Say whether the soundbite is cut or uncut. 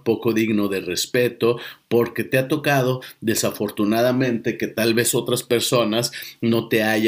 uncut